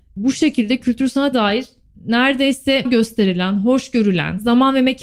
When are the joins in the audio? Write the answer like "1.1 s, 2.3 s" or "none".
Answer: 1.3 s, 2.8 s